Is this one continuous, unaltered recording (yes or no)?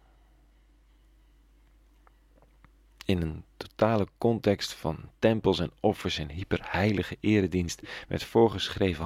yes